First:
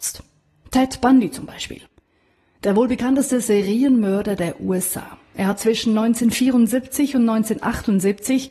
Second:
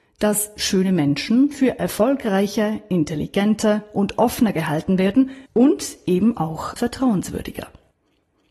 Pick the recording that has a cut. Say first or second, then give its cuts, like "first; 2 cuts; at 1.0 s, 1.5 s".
second; 1 cut; at 5.5 s